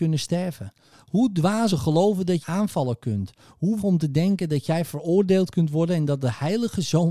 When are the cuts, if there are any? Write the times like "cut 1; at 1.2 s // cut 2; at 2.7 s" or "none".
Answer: cut 1; at 1.7 s // cut 2; at 2.4 s // cut 3; at 3.8 s